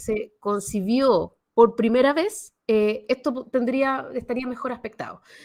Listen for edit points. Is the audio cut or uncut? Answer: cut